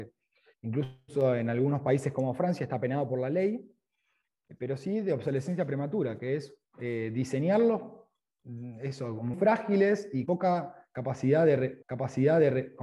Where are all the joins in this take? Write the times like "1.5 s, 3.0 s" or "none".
6.6 s, 9.3 s, 10.3 s, 11.8 s